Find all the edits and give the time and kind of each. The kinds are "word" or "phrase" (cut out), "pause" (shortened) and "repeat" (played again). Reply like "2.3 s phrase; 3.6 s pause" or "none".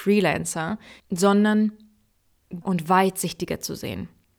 1.0 s word; 2.6 s word